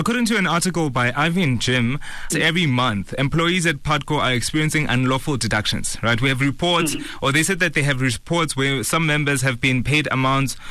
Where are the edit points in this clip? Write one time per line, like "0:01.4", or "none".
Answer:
0:02.3